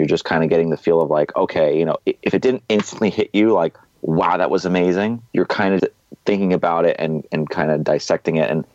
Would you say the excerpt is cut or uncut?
cut